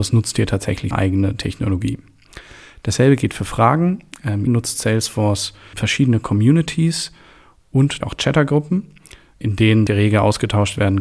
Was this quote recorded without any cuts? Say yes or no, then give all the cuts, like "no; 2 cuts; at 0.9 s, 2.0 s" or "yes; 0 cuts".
no; 6 cuts; at 0.9 s, 4.5 s, 5.7 s, 8.0 s, 9.4 s, 9.9 s